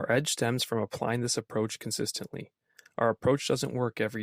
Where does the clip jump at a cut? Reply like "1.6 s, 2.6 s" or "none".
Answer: none